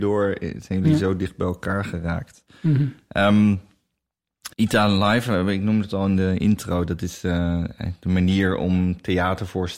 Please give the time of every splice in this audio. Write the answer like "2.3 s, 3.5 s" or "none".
4.5 s